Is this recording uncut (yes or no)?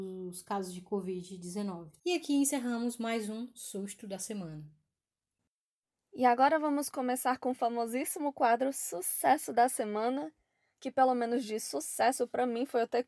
no